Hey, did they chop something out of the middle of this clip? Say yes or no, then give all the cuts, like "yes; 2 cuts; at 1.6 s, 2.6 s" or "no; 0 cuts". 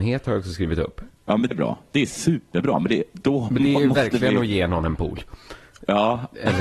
yes; 2 cuts; at 1.2 s, 1.5 s